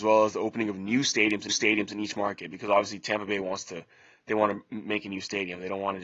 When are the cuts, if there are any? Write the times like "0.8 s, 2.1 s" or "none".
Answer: 1.5 s